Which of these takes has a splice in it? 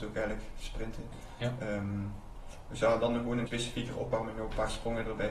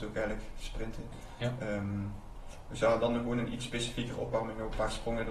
first; 1 cut; at 3.5 s

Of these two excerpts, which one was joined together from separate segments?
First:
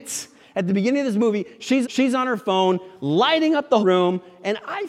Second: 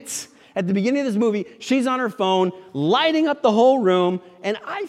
first; 2 cuts; at 1.8 s, 3.8 s

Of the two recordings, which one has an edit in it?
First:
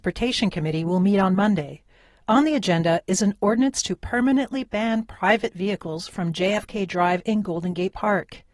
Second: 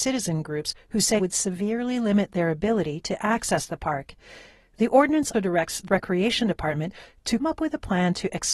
second; 4 cuts; at 1.2 s, 5.3 s, 5.9 s, 7.4 s

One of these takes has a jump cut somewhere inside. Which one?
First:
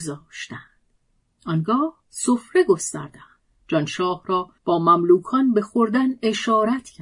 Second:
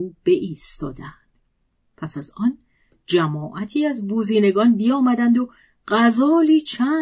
first; 3 cuts; at 2.0 s, 3.4 s, 4.6 s

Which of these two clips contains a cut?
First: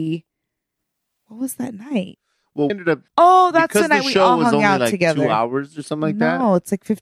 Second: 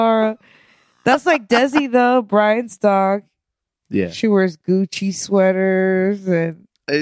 first; 2 cuts; at 2.7 s, 3.1 s

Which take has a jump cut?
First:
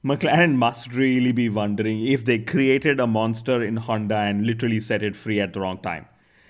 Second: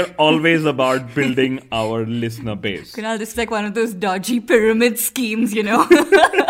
second; 1 cut; at 3.3 s

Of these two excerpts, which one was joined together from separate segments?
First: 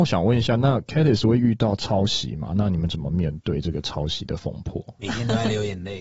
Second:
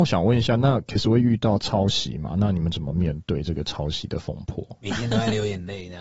second; 1 cut; at 1.0 s

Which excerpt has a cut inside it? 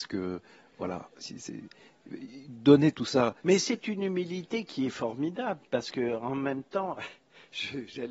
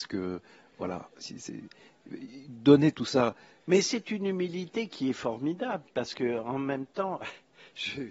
first; 1 cut; at 3.4 s

